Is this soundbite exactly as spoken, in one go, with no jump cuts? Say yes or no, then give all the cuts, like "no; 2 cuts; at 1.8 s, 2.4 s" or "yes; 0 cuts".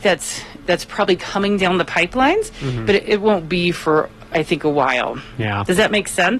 yes; 0 cuts